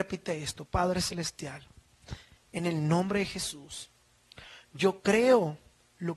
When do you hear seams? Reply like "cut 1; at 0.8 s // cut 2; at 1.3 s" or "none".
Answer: none